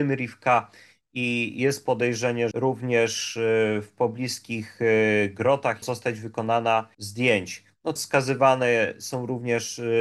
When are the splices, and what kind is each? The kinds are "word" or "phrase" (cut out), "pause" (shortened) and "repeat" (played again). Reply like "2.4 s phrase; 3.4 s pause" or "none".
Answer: 2.5 s word; 5.8 s phrase; 6.9 s word; 8.0 s word